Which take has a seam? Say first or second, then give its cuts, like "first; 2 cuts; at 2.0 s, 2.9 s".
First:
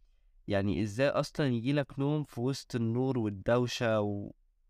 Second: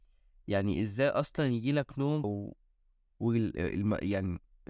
second; 1 cut; at 2.2 s